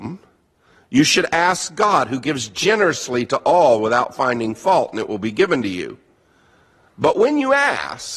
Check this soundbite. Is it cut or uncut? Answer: uncut